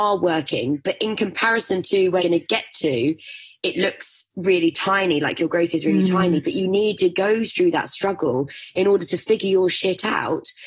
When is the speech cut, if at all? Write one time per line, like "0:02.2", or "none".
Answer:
0:02.2